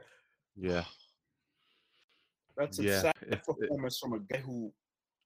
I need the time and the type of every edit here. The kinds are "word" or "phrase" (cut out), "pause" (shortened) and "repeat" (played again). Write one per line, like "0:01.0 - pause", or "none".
none